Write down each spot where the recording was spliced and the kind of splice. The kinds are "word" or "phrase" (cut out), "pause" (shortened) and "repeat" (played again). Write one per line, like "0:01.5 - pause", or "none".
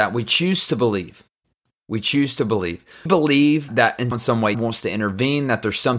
0:03.1 - word
0:03.7 - word
0:04.1 - word
0:04.5 - word